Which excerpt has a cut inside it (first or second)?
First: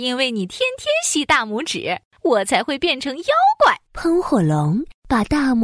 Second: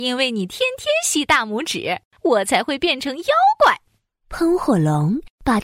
first